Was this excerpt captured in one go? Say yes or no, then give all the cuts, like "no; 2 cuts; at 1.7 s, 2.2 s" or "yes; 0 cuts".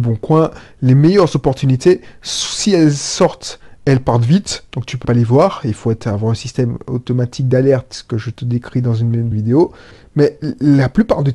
no; 2 cuts; at 5.0 s, 9.3 s